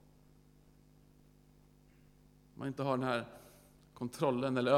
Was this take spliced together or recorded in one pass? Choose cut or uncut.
uncut